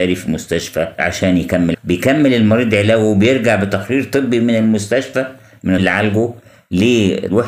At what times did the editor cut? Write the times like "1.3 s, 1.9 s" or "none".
1.7 s, 5.8 s